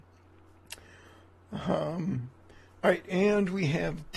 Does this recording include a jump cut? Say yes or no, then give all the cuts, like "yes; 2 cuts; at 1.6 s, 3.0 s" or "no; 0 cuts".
no; 0 cuts